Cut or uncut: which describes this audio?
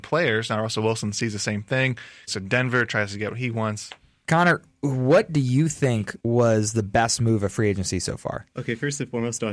cut